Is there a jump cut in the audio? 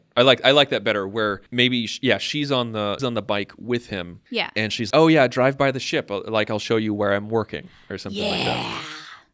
yes; 4 cuts; at 1.5 s, 3.0 s, 4.3 s, 4.9 s

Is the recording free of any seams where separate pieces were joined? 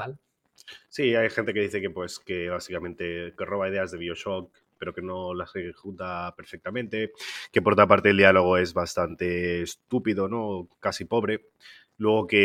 no; 1 cut; at 10.7 s

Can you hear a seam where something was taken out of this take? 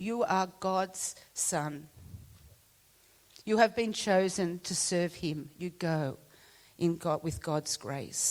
no; 0 cuts

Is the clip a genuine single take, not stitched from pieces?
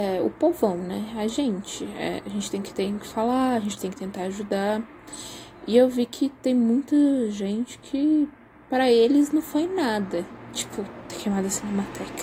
yes; 0 cuts

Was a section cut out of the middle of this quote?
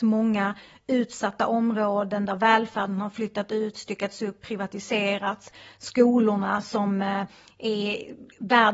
no; 0 cuts

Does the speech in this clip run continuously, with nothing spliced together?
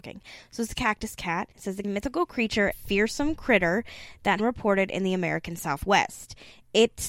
no; 4 cuts; at 1.5 s, 1.8 s, 2.7 s, 4.4 s

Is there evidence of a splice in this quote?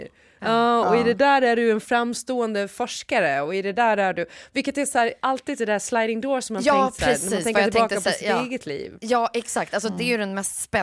no; 0 cuts

